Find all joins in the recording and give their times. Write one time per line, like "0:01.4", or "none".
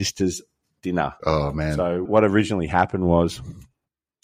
0:02.1

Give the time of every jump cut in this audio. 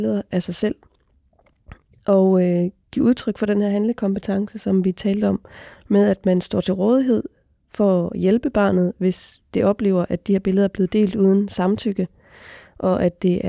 none

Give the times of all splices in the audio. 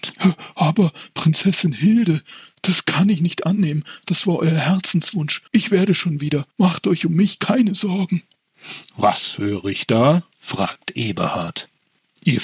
0:05.5
0:06.5
0:10.3

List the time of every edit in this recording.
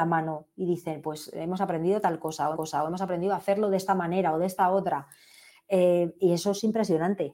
0:02.5

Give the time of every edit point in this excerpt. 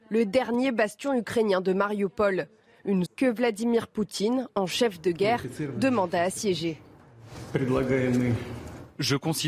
0:03.1

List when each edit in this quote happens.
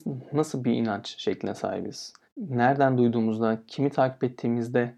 0:02.2

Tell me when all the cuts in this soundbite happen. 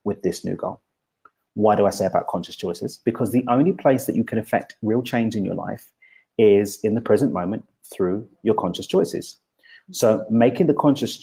none

